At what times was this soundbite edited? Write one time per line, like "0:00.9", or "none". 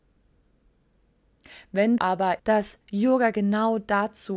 0:02.0
0:02.4